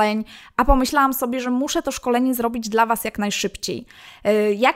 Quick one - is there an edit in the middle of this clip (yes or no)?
no